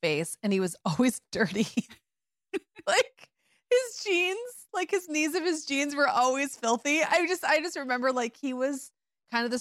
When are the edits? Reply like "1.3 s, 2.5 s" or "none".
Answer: none